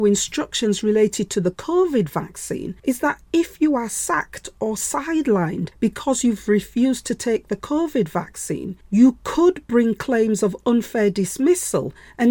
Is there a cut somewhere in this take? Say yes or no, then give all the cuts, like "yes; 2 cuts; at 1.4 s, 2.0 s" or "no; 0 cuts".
yes; 3 cuts; at 2.8 s, 5.7 s, 8.8 s